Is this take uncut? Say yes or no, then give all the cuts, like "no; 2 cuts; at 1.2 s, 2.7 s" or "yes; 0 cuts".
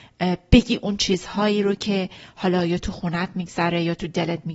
yes; 0 cuts